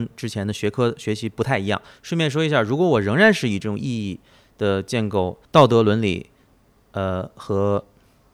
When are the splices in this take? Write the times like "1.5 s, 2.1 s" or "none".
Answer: 5.4 s